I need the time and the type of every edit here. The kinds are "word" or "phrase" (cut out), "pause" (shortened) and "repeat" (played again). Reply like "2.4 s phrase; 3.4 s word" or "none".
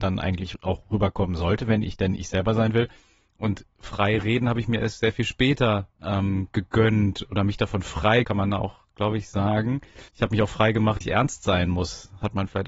5.9 s pause; 8.2 s word; 10.1 s pause; 11.0 s word